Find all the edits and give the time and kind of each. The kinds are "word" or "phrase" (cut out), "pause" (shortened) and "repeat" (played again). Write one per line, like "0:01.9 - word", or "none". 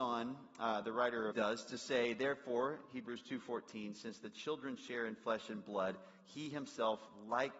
0:01.3 - phrase